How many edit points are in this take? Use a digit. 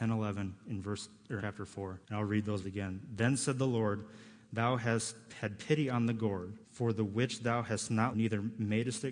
5